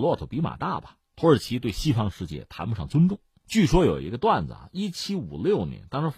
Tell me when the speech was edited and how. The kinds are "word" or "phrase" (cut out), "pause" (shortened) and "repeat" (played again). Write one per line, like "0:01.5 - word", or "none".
none